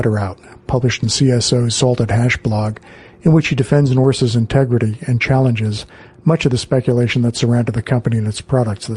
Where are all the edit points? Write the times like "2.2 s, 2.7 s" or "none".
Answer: none